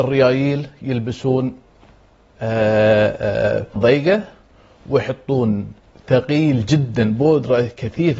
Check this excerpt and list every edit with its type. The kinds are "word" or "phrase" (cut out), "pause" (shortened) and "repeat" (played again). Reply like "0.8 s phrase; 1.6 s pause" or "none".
3.8 s word; 5.9 s word

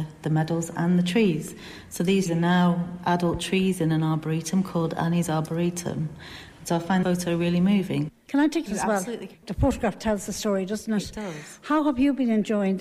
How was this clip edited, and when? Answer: 2.3 s word; 7.0 s word; 8.7 s phrase

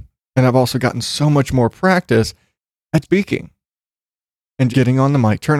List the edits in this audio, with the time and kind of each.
3.0 s word; 4.7 s word

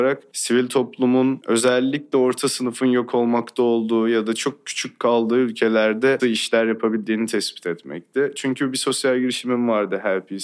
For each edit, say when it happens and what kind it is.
6.2 s word

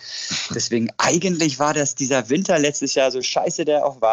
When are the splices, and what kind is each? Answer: none

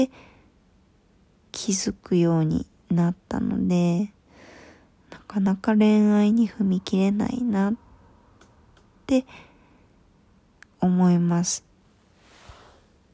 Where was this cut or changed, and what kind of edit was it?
none

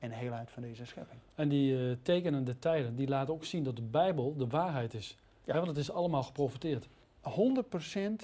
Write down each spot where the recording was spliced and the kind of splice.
none

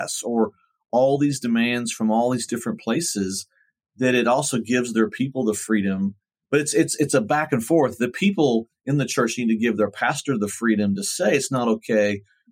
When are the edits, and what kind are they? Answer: none

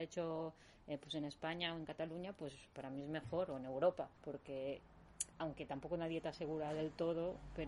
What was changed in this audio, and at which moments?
4.1 s pause

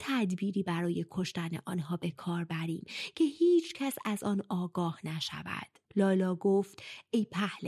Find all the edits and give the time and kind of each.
5.9 s pause

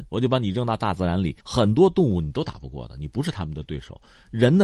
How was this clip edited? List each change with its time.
1.4 s pause

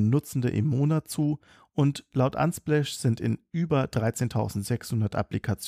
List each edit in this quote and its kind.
none

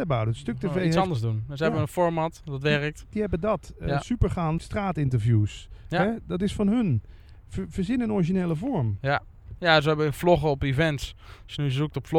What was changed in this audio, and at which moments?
4.6 s word

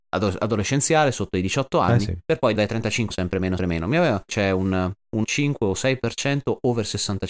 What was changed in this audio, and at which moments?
2.2 s pause; 2.6 s word; 3.1 s phrase; 3.6 s word; 4.3 s phrase; 5.2 s word

